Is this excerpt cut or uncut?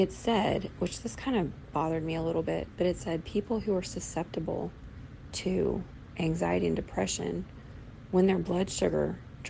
uncut